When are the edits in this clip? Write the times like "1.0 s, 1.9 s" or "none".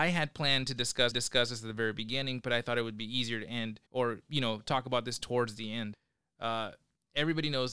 1.1 s, 3.9 s